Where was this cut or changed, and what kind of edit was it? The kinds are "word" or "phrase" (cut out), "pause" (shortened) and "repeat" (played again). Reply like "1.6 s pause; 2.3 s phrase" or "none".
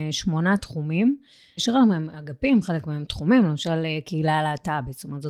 1.6 s word

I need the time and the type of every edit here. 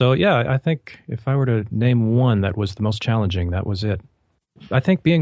none

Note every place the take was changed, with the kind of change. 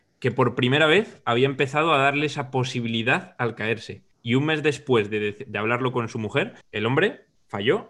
4.1 s pause; 6.6 s pause

